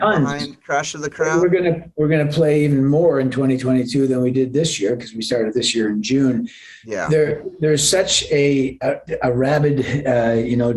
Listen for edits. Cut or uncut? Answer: uncut